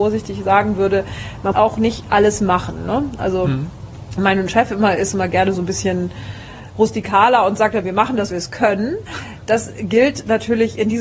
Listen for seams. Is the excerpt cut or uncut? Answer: cut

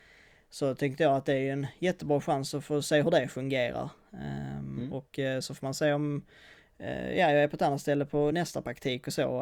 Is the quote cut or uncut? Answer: uncut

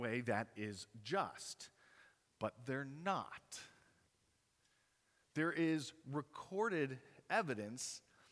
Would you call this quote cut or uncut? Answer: uncut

